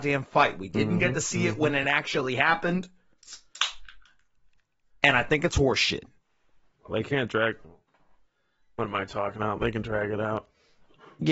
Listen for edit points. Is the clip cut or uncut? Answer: uncut